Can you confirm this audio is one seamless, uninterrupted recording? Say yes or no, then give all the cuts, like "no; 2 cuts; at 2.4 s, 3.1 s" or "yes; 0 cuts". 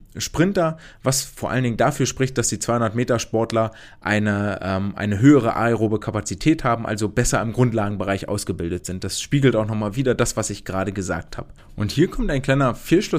yes; 0 cuts